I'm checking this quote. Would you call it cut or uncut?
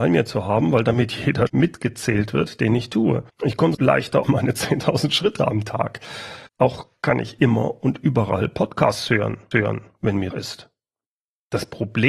cut